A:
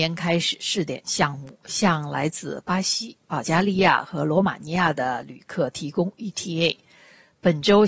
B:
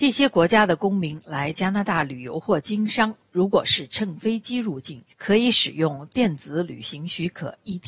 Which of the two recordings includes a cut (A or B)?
B